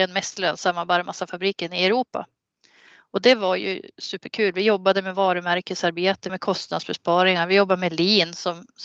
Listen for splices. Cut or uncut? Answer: cut